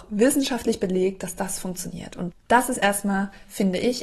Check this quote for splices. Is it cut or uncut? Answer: cut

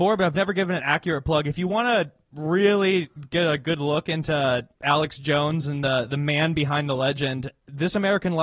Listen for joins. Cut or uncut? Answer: cut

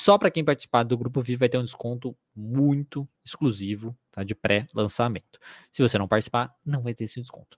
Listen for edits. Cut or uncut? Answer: cut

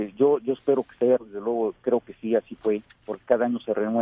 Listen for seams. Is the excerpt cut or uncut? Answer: cut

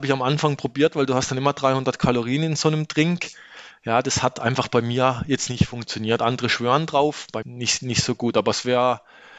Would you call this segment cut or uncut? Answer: cut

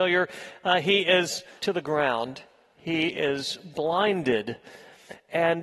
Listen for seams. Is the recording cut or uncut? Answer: cut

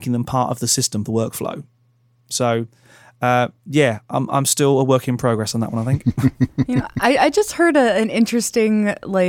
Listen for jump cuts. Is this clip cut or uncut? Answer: cut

